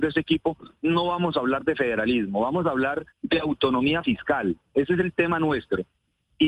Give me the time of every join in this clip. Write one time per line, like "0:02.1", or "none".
0:03.1